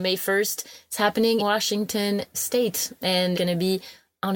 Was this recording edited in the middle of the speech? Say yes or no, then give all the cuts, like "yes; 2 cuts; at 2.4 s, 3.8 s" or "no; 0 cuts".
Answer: yes; 3 cuts; at 1.4 s, 2.3 s, 3.3 s